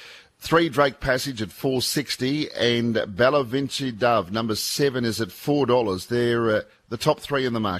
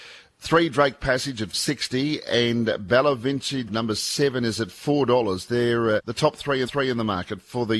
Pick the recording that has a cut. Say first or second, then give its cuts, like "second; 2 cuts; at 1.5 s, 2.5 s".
second; 4 cuts; at 1.5 s, 3.7 s, 6.0 s, 6.6 s